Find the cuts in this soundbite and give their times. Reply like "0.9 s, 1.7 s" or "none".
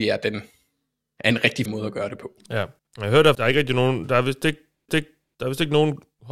1.7 s, 2.8 s, 3.3 s, 4.9 s